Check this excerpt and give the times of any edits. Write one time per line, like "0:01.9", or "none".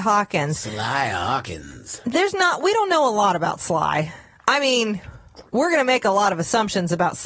none